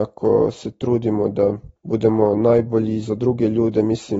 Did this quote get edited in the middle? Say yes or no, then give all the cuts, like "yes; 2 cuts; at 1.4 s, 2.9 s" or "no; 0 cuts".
yes; 1 cut; at 1.8 s